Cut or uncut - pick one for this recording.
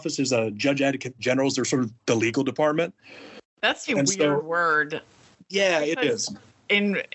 cut